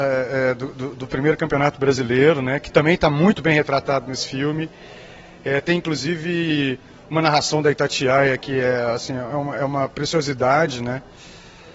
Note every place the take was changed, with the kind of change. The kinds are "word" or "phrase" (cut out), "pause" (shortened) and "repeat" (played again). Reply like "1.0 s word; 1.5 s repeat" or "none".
none